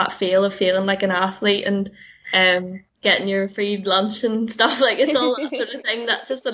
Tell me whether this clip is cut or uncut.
cut